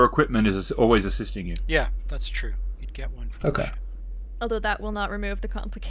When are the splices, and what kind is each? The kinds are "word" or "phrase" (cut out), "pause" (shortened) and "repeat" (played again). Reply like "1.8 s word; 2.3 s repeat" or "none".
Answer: none